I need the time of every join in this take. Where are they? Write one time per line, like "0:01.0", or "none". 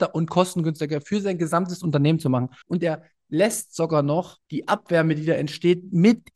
0:02.6
0:04.4